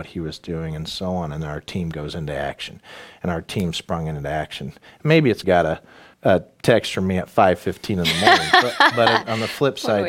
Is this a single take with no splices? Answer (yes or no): no